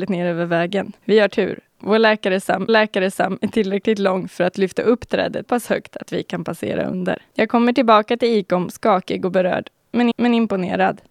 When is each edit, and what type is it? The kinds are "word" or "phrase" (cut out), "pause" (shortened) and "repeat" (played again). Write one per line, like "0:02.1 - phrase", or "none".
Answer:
0:01.0 - pause
0:02.7 - repeat
0:05.5 - word
0:07.3 - pause
0:10.1 - repeat